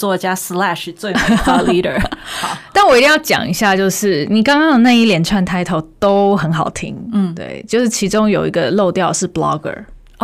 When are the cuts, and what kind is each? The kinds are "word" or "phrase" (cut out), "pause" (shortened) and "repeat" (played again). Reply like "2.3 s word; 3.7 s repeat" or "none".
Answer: none